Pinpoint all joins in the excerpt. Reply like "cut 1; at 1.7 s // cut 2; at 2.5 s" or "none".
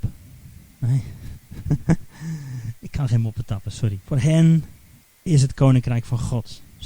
cut 1; at 4.0 s